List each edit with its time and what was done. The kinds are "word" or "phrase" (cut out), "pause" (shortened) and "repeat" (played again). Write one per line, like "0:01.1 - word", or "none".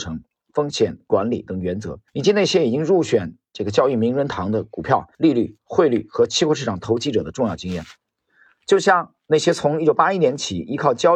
0:02.1 - pause
0:05.1 - pause